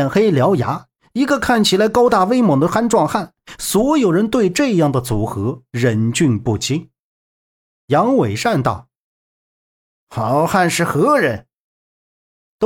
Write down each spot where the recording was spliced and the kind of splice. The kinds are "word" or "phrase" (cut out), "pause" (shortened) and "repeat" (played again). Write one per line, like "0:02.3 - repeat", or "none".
none